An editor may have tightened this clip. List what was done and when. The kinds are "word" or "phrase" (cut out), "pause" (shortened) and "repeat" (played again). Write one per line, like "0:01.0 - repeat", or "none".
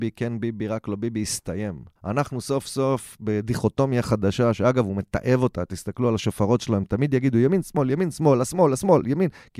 0:02.0 - pause